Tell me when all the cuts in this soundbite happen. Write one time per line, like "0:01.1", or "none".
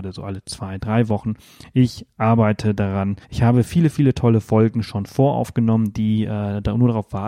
0:03.2